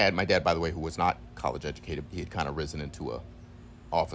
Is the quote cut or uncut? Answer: cut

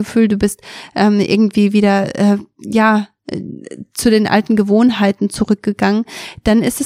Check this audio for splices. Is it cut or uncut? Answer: uncut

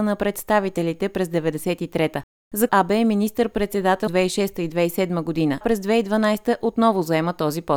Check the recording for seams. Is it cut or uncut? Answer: cut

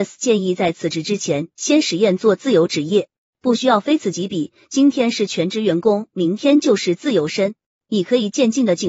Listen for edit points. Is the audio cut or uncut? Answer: uncut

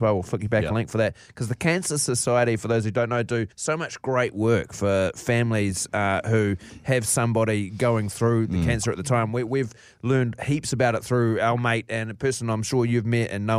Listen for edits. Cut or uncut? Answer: cut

